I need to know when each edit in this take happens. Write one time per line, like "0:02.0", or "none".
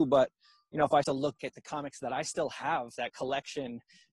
0:01.0
0:01.4